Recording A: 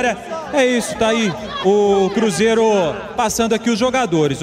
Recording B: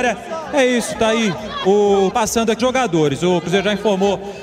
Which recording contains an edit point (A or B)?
B